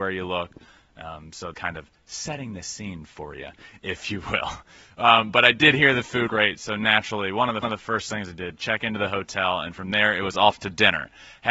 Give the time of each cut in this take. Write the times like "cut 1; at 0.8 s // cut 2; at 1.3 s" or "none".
cut 1; at 1.5 s // cut 2; at 6.3 s // cut 3; at 7.6 s